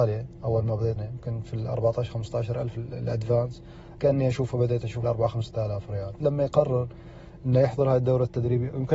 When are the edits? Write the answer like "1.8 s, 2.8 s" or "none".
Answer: 1.0 s, 4.0 s, 5.0 s, 6.2 s